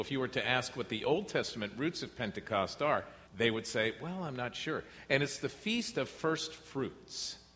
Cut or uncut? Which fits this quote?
cut